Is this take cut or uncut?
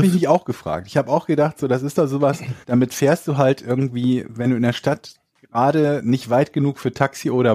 cut